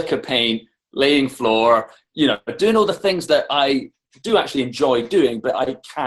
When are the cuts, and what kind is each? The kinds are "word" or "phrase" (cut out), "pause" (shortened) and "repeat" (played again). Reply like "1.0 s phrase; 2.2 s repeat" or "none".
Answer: none